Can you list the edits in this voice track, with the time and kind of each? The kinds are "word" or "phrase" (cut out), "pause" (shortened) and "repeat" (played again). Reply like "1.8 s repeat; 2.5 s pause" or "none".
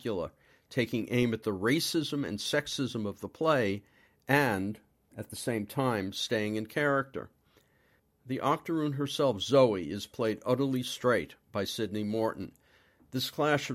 none

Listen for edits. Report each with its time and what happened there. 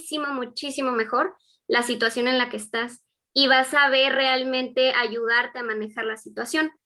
none

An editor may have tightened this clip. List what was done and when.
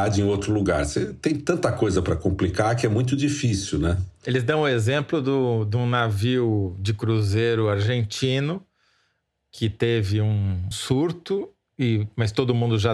10.7 s word

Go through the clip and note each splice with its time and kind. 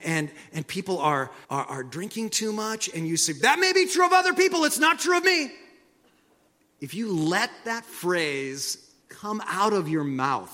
1.4 s pause; 6.5 s pause; 9.0 s pause

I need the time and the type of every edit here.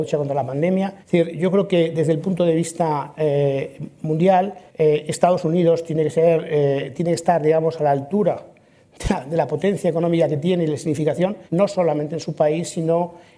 1.0 s pause; 4.7 s pause; 11.5 s pause

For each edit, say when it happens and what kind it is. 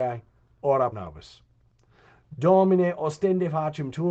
0.9 s word

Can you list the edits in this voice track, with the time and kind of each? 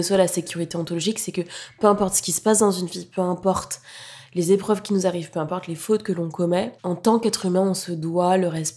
6.8 s pause

